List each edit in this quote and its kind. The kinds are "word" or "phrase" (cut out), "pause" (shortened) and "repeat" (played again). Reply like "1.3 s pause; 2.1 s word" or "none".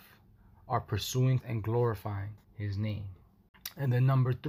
1.4 s word; 2.4 s pause